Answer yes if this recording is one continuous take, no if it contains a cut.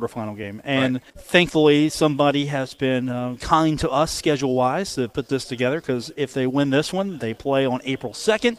no